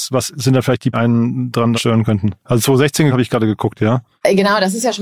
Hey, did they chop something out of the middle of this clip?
yes; 4 cuts; at 0.9 s, 1.7 s, 2.4 s, 3.1 s

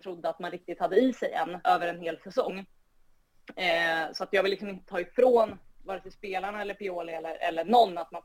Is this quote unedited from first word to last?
no; 1 cut; at 1.6 s

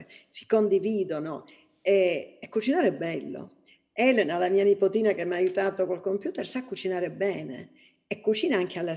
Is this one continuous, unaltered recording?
yes; 0 cuts

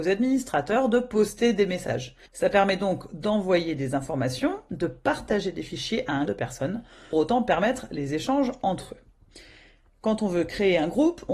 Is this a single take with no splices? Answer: no; 3 cuts; at 2.3 s, 6.3 s, 7.1 s

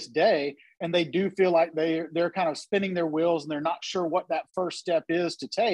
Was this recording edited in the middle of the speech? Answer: no; 0 cuts

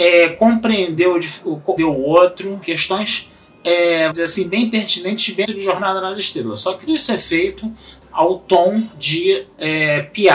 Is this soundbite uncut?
no; 7 cuts; at 1.8 s, 2.6 s, 4.1 s, 5.4 s, 6.9 s, 8.0 s, 8.9 s

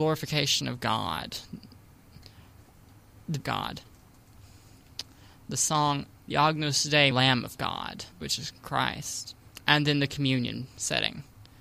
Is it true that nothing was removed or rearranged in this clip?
no; 4 cuts; at 3.4 s, 6.2 s, 7.1 s, 8.1 s

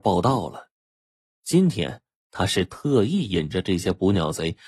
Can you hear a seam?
no; 0 cuts

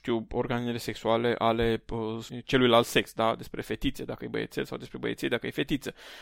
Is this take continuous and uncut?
yes; 0 cuts

